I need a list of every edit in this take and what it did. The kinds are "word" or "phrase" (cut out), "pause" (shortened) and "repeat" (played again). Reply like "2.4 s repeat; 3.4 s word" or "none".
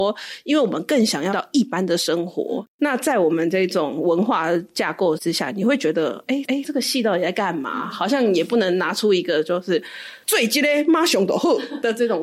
1.3 s word; 6.4 s repeat

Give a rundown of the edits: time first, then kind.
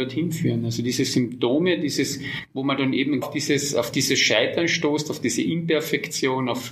3.2 s word

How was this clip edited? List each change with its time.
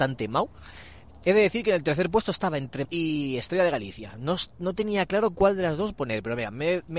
2.8 s word

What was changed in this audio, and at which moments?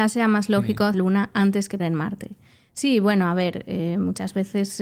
0.9 s phrase; 1.8 s word

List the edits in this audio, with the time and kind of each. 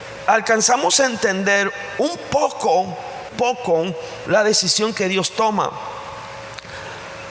3.3 s word

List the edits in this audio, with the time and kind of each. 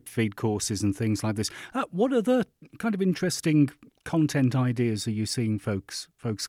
none

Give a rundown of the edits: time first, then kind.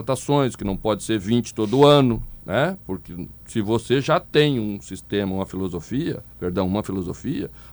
2.4 s pause; 3.4 s pause; 6.3 s pause

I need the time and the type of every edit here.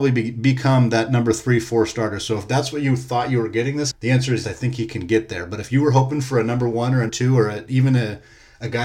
3.9 s word; 4.4 s word; 7.1 s word

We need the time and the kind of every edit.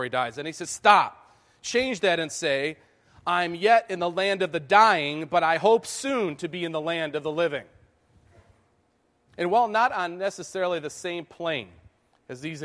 none

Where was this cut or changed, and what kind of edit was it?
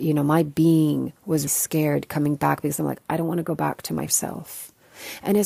1.5 s word; 4.1 s word

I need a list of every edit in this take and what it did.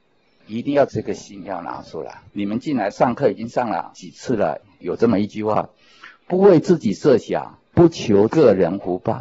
2.3 s pause; 7.7 s pause

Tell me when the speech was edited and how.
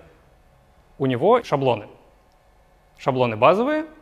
1.4 s word

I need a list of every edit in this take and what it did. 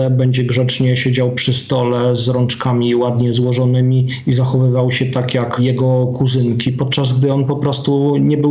none

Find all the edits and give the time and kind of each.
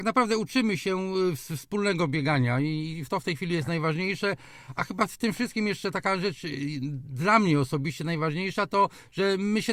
none

